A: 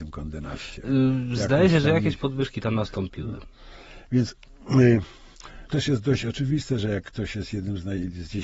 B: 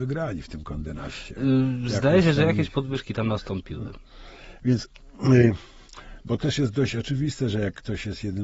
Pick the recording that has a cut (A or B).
A